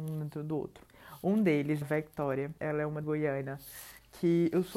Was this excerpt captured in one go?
no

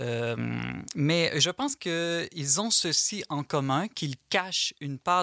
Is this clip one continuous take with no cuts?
yes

